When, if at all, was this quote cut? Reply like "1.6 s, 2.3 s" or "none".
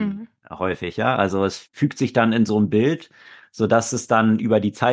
none